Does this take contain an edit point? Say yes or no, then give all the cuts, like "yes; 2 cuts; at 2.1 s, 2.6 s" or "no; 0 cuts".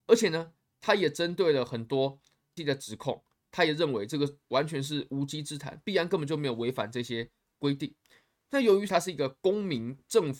yes; 2 cuts; at 2.6 s, 8.9 s